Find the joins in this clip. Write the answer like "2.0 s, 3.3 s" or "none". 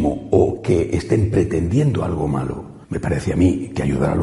2.8 s